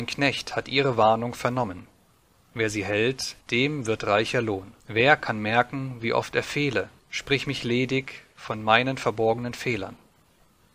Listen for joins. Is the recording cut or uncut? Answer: cut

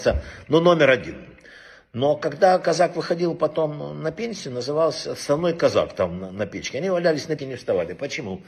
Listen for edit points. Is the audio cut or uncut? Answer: cut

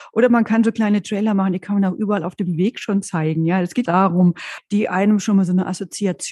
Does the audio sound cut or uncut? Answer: cut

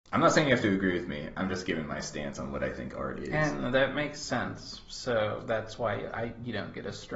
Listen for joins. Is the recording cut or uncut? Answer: uncut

